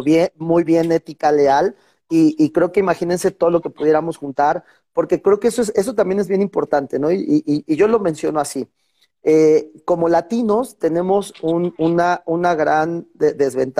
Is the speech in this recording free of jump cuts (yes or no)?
yes